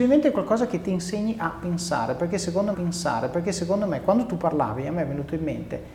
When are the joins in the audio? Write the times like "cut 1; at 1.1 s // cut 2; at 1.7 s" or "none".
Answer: cut 1; at 2.7 s